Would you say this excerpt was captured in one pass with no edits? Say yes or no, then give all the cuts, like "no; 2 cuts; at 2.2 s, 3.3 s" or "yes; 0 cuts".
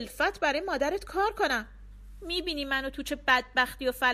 yes; 0 cuts